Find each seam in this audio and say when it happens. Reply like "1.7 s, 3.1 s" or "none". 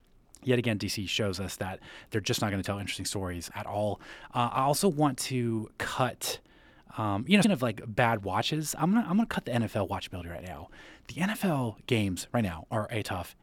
3.5 s, 7.4 s